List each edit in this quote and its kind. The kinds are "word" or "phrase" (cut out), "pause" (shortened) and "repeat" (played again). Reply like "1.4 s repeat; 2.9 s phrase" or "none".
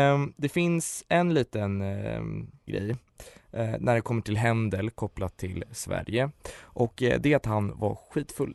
2.7 s word

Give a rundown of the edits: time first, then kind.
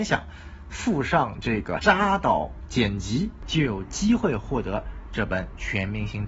1.8 s word

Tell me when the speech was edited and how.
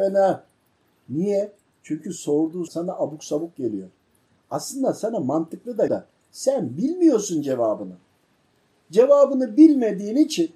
2.7 s word; 5.9 s word

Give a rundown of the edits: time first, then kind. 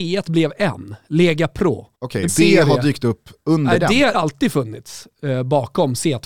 1.9 s pause; 2.3 s phrase; 4.1 s word

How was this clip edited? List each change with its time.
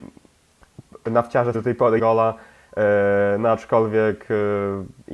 1.5 s word; 2.0 s word

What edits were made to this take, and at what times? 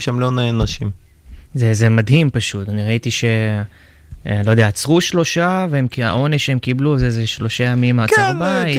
none

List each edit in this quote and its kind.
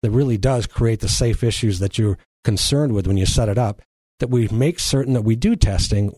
none

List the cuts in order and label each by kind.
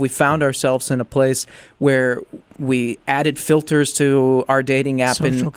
2.5 s word

